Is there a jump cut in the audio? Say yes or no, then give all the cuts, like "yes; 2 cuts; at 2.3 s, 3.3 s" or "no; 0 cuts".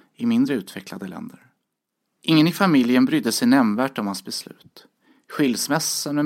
yes; 1 cut; at 1.9 s